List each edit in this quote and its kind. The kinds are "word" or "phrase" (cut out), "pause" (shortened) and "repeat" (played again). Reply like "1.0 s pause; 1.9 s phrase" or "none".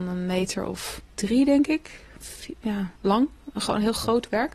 1.1 s pause; 3.0 s pause